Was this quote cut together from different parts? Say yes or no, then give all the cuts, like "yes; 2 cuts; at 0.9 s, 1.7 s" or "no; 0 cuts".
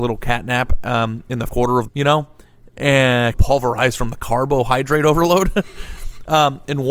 yes; 3 cuts; at 1.5 s, 1.9 s, 3.3 s